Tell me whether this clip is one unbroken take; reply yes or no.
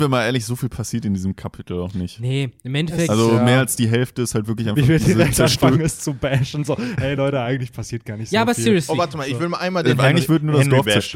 yes